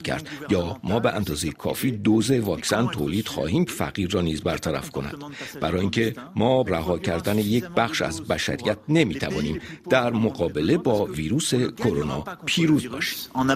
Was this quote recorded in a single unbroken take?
no; 2 cuts; at 3.7 s, 6.6 s

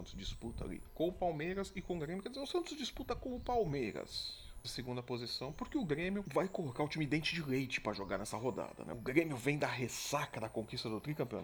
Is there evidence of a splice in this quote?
yes; 1 cut; at 4.6 s

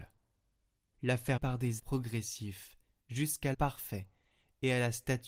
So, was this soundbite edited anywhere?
yes; 3 cuts; at 1.4 s, 1.8 s, 3.5 s

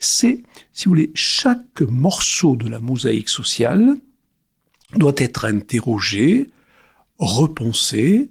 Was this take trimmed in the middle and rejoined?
no; 0 cuts

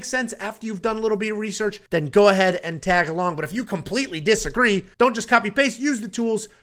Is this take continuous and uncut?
no; 2 cuts; at 1.9 s, 4.9 s

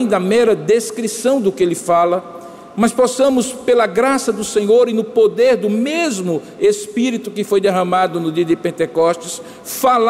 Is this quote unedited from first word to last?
yes; 0 cuts

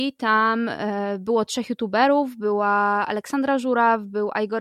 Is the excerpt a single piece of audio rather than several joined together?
yes; 0 cuts

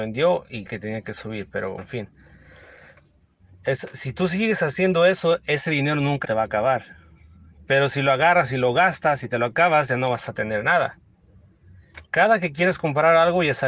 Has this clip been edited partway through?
yes; 3 cuts; at 1.8 s, 6.2 s, 12.1 s

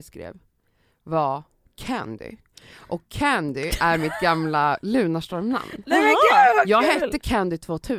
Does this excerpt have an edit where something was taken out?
no; 0 cuts

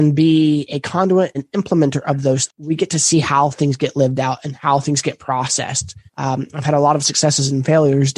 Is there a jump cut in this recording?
yes; 3 cuts; at 1.3 s, 2.5 s, 6.1 s

